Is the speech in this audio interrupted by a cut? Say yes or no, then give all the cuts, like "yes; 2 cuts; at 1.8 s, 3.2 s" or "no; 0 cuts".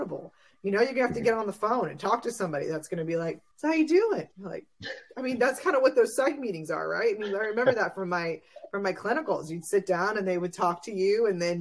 yes; 2 cuts; at 3.5 s, 4.3 s